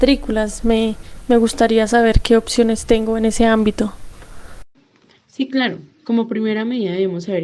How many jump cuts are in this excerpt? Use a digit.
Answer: 0